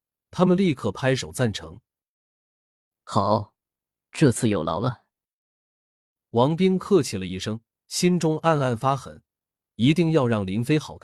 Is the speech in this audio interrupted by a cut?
no; 0 cuts

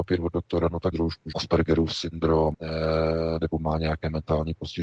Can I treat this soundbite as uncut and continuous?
no; 3 cuts; at 0.9 s, 1.3 s, 2.5 s

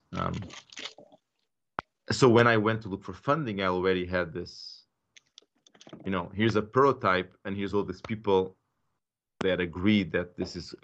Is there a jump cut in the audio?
no; 0 cuts

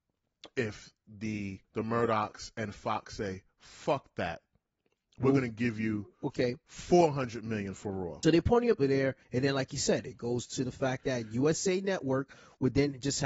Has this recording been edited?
yes; 4 cuts; at 1.6 s, 8.2 s, 8.8 s, 9.2 s

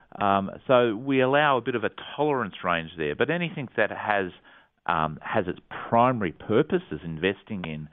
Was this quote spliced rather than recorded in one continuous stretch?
no; 0 cuts

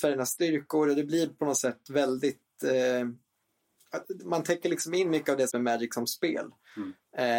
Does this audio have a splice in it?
yes; 1 cut; at 5.5 s

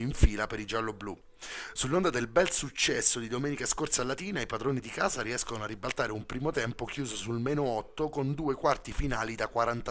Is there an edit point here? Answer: no; 0 cuts

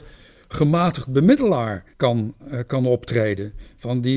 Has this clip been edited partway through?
yes; 1 cut; at 1.9 s

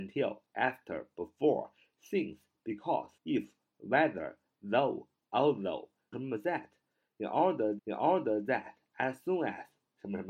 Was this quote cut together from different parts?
yes; 3 cuts; at 3.2 s, 6.1 s, 7.8 s

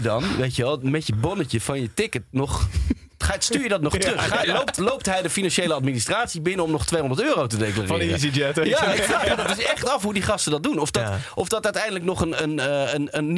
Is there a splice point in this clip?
no; 0 cuts

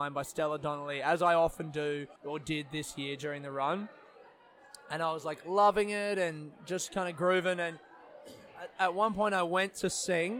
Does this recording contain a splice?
yes; 1 cut; at 2.2 s

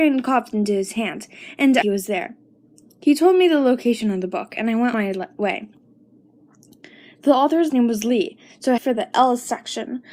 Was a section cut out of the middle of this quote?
yes; 4 cuts; at 1.8 s, 4.9 s, 7.7 s, 8.8 s

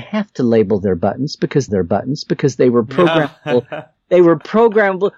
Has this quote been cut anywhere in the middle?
yes; 1 cut; at 1.7 s

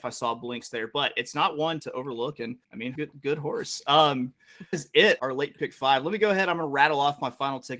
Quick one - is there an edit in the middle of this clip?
yes; 5 cuts; at 1.8 s, 2.6 s, 2.9 s, 4.7 s, 5.2 s

